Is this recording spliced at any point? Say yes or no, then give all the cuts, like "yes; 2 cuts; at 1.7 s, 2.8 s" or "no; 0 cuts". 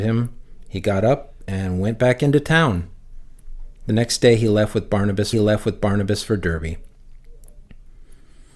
yes; 1 cut; at 5.3 s